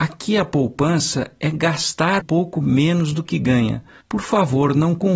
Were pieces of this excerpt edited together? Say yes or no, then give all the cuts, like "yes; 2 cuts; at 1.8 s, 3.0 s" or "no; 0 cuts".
yes; 2 cuts; at 2.2 s, 4.0 s